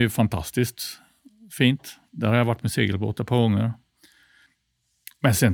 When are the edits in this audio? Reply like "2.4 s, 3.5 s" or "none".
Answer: none